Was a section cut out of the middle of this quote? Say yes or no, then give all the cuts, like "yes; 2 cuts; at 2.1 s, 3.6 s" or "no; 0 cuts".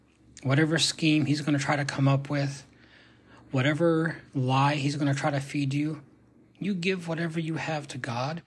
no; 0 cuts